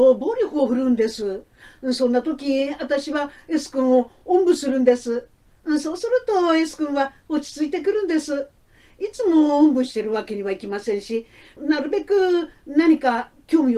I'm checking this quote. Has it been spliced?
no; 0 cuts

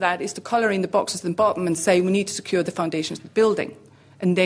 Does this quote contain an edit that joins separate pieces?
no; 0 cuts

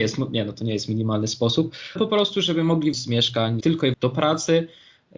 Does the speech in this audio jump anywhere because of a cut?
yes; 4 cuts; at 2.0 s, 2.9 s, 3.6 s, 3.9 s

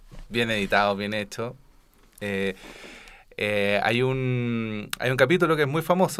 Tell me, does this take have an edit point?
no; 0 cuts

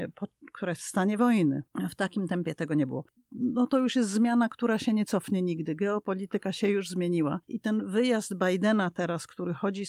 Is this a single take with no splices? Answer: yes; 0 cuts

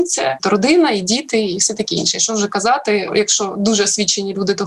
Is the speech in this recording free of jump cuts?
yes; 0 cuts

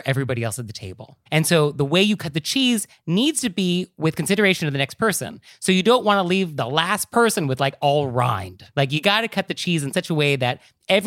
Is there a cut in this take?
yes; 2 cuts; at 1.3 s, 8.7 s

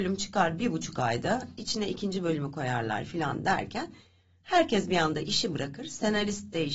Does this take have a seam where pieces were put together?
no; 0 cuts

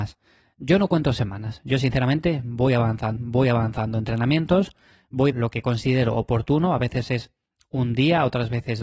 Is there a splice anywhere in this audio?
yes; 2 cuts; at 3.2 s, 5.3 s

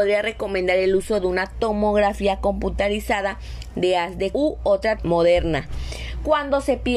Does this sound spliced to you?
yes; 2 cuts; at 4.3 s, 5.0 s

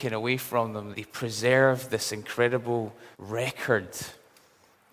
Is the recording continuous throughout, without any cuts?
no; 2 cuts; at 0.9 s, 3.1 s

